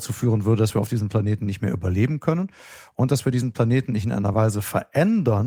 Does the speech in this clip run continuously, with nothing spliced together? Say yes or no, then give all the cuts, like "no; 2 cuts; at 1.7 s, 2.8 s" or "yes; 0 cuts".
yes; 0 cuts